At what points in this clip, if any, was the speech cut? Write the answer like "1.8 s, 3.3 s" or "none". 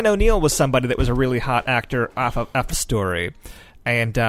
2.7 s